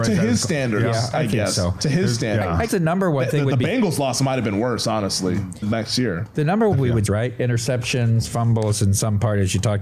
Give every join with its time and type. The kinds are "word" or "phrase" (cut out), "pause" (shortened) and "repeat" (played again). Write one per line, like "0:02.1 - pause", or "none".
0:02.7 - word
0:05.6 - word
0:06.7 - phrase
0:07.1 - phrase